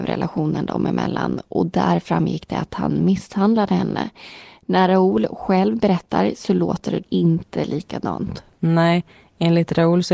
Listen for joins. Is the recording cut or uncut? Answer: cut